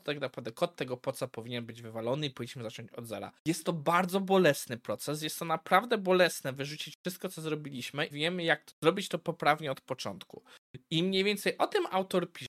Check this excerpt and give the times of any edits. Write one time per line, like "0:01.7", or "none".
0:03.4
0:08.1
0:08.7